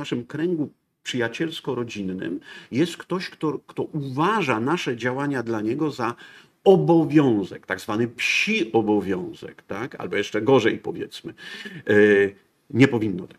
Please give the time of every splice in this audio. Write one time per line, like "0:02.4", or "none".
none

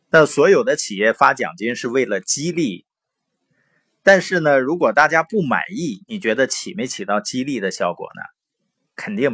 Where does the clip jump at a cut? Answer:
none

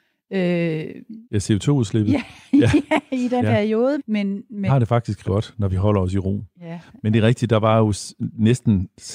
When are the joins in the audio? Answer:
0:01.2
0:03.4
0:04.0
0:04.7
0:05.2

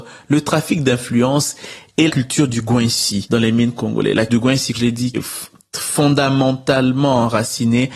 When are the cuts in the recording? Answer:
0:02.1
0:04.3
0:04.7
0:05.1

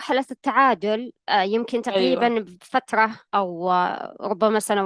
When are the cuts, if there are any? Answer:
0:03.3

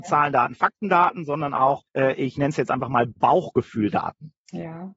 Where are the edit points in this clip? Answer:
0:01.9
0:02.4

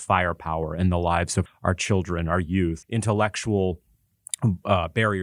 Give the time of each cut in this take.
0:01.5
0:02.8

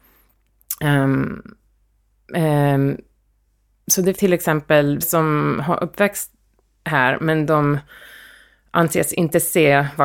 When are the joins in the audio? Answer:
0:04.1
0:05.0

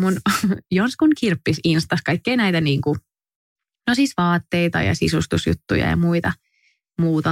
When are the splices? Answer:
none

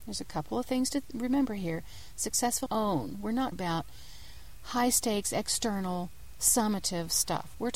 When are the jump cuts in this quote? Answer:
0:02.7
0:03.5

